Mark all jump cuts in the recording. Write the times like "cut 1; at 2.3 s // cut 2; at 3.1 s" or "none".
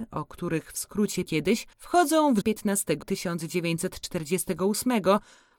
cut 1; at 1.3 s // cut 2; at 1.7 s // cut 3; at 2.4 s // cut 4; at 3.0 s